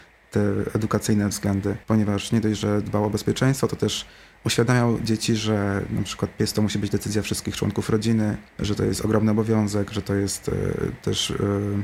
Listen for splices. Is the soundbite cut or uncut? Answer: cut